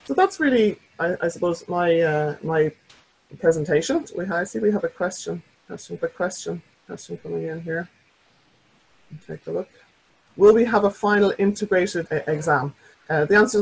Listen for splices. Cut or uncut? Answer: cut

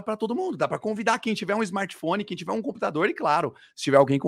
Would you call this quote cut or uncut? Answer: uncut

